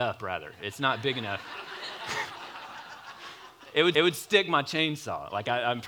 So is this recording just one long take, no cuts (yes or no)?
no